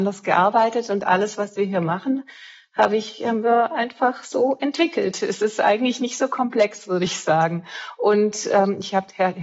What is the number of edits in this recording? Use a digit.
0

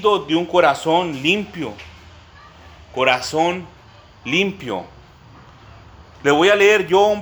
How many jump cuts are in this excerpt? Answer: 0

